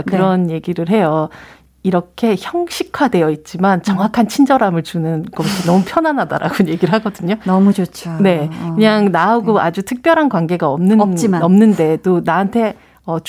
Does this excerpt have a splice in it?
no; 0 cuts

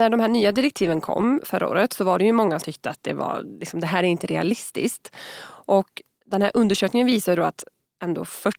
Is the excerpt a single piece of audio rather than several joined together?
no; 1 cut; at 2.6 s

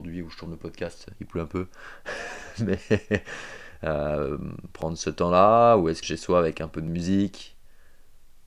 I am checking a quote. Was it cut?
yes; 1 cut; at 6.0 s

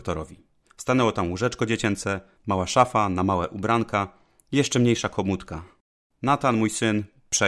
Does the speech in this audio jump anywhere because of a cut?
no; 0 cuts

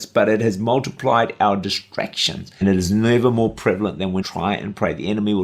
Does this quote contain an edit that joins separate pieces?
yes; 2 cuts; at 2.6 s, 4.2 s

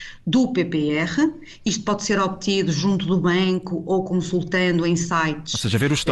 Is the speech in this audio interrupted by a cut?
no; 0 cuts

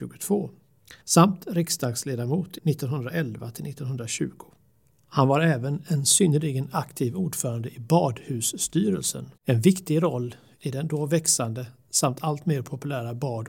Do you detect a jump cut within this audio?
yes; 4 cuts; at 1.0 s, 2.6 s, 4.6 s, 9.4 s

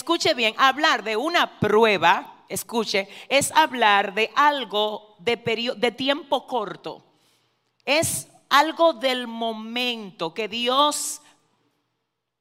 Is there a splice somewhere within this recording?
no; 0 cuts

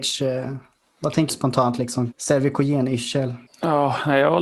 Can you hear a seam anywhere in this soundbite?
yes; 3 cuts; at 1.3 s, 2.1 s, 3.5 s

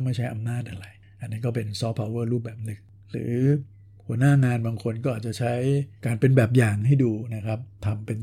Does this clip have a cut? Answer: yes; 1 cut; at 6.0 s

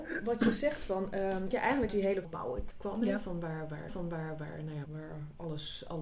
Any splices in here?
yes; 6 cuts; at 1.5 s, 1.9 s, 2.2 s, 2.7 s, 3.9 s, 4.8 s

